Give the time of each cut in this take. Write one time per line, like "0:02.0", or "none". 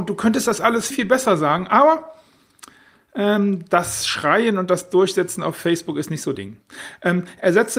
0:00.9
0:06.4